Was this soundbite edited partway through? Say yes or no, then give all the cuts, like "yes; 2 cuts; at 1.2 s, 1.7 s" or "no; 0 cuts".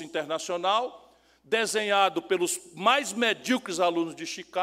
no; 0 cuts